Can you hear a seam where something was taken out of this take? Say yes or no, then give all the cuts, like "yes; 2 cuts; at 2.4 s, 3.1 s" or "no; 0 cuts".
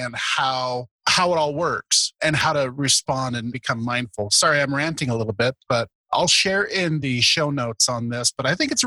yes; 2 cuts; at 1.0 s, 6.0 s